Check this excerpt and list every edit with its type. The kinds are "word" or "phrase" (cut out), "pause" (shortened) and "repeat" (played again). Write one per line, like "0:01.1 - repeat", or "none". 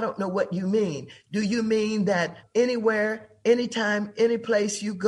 0:02.4 - word